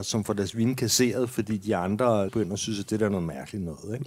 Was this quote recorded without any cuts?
no; 1 cut; at 2.3 s

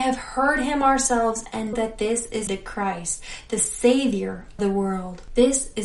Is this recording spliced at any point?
yes; 3 cuts; at 1.7 s, 2.5 s, 4.6 s

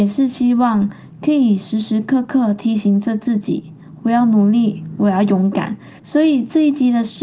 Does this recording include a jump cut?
yes; 2 cuts; at 4.9 s, 6.0 s

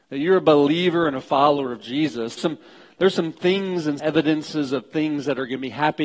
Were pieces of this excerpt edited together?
yes; 2 cuts; at 2.4 s, 4.0 s

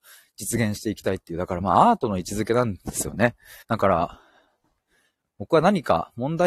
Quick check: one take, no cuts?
no; 1 cut; at 3.6 s

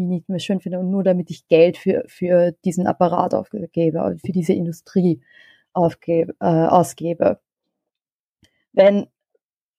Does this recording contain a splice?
no; 0 cuts

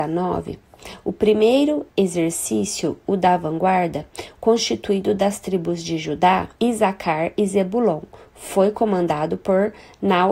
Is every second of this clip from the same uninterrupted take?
no; 2 cuts; at 1.9 s, 6.6 s

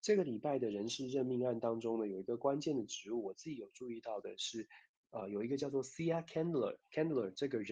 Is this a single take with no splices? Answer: yes; 0 cuts

